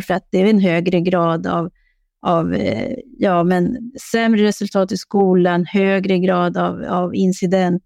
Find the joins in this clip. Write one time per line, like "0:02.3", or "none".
none